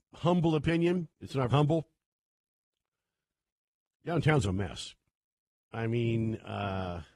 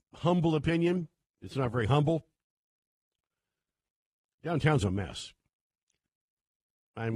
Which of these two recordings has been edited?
first; 3 cuts; at 1.1 s, 1.5 s, 5.2 s

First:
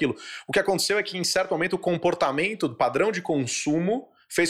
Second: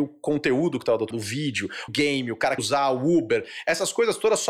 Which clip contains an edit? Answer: second; 3 cuts; at 1.1 s, 1.9 s, 2.6 s

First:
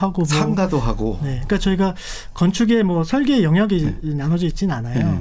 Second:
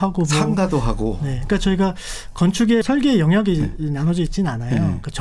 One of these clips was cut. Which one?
second; 1 cut; at 2.8 s

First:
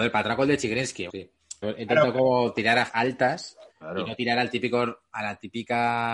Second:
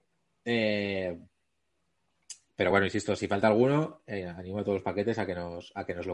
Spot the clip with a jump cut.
first; 4 cuts; at 1.1 s, 1.6 s, 2.9 s, 3.7 s

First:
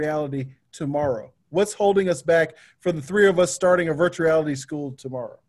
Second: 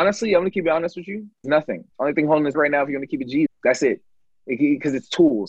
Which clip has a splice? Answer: second; 4 cuts; at 1.4 s, 1.9 s, 2.5 s, 3.5 s

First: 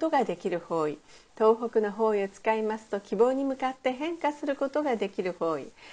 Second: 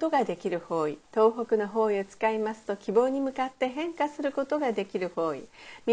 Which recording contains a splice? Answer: second; 1 cut; at 1.0 s

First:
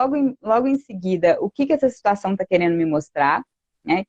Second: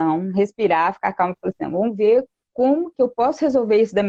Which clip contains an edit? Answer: second; 1 cut; at 2.9 s

